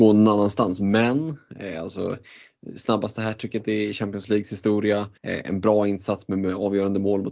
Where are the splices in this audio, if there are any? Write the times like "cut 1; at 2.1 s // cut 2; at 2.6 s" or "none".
cut 1; at 5.2 s

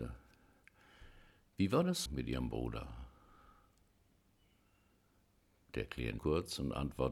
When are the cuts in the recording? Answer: cut 1; at 2.1 s // cut 2; at 6.2 s

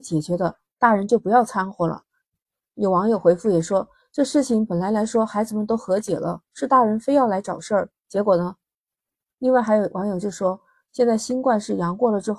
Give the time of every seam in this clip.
none

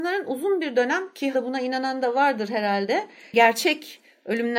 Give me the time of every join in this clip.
cut 1; at 1.3 s

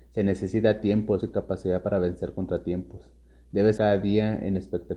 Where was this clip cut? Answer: cut 1; at 1.2 s // cut 2; at 3.8 s

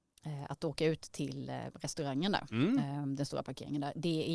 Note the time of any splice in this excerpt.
cut 1; at 1.7 s

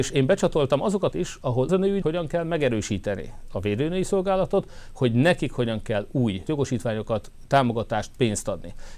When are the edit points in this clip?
cut 1; at 1.1 s // cut 2; at 1.7 s // cut 3; at 2.0 s // cut 4; at 6.5 s

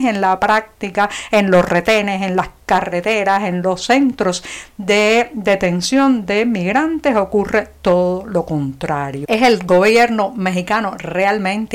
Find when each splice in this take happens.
none

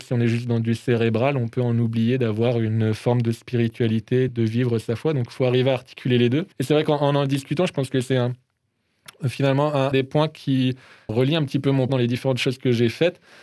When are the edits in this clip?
cut 1; at 4.3 s // cut 2; at 6.5 s // cut 3; at 9.9 s // cut 4; at 11.1 s // cut 5; at 11.9 s

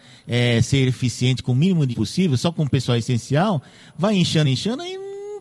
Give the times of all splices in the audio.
cut 1; at 1.9 s // cut 2; at 4.4 s

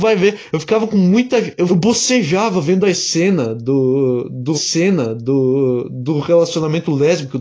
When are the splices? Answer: cut 1; at 1.7 s // cut 2; at 4.5 s

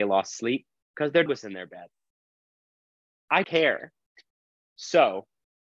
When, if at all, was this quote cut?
cut 1; at 1.3 s // cut 2; at 3.4 s // cut 3; at 4.4 s

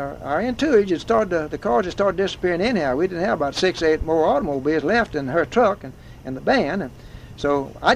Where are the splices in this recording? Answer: none

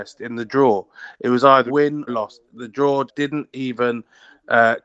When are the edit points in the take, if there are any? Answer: cut 1; at 1.7 s // cut 2; at 2.1 s // cut 3; at 3.1 s

